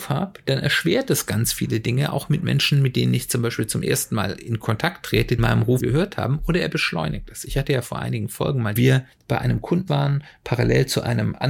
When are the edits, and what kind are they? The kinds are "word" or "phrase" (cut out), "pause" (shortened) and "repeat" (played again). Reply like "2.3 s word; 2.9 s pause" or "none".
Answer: 5.4 s phrase; 5.8 s word; 8.8 s phrase; 9.9 s word